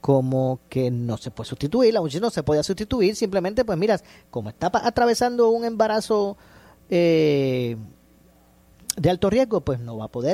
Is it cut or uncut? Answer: uncut